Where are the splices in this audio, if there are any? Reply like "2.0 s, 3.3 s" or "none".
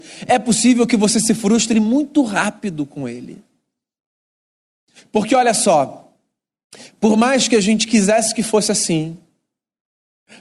none